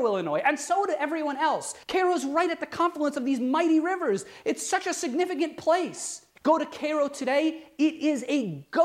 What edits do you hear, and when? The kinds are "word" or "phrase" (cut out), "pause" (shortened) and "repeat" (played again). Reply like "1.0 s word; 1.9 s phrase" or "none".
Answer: 1.8 s pause; 6.4 s pause